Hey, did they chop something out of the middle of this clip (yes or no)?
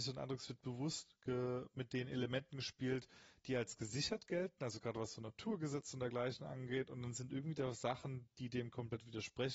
no